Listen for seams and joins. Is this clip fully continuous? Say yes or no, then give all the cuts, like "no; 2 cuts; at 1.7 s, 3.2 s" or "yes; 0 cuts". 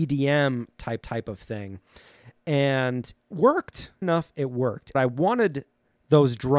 no; 4 cuts; at 1.0 s, 3.3 s, 4.0 s, 4.9 s